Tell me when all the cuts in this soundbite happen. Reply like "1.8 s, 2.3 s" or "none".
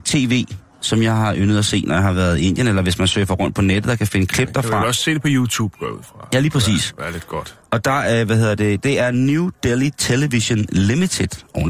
none

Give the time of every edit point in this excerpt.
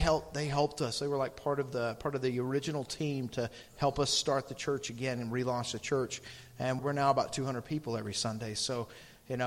6.8 s

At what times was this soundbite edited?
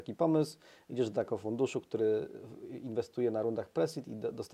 none

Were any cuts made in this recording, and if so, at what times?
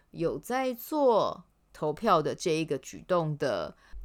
none

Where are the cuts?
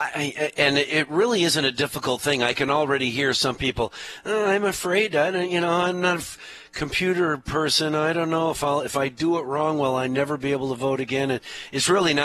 6.2 s

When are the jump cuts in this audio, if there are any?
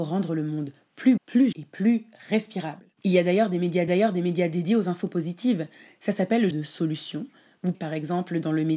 1.2 s, 1.5 s, 2.9 s, 3.9 s, 6.5 s, 7.7 s

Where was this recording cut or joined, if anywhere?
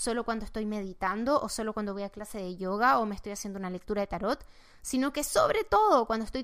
none

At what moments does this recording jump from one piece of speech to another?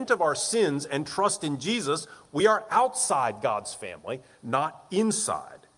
none

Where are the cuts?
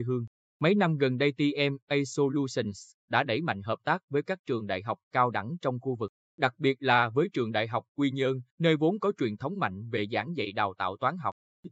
8.5 s

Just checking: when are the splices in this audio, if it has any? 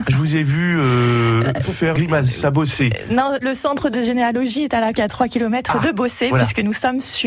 1.4 s, 1.9 s, 3.4 s, 3.9 s, 4.9 s

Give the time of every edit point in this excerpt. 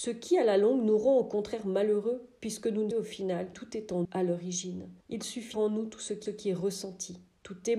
2.9 s, 3.5 s, 4.0 s, 5.0 s, 5.5 s, 6.3 s

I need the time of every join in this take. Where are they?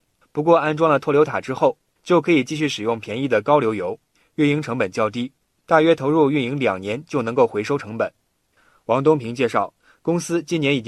none

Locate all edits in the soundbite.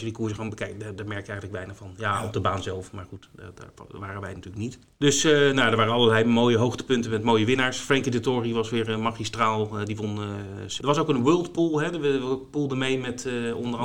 none

